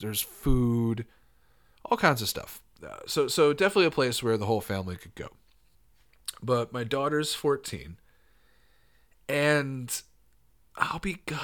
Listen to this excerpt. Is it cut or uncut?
uncut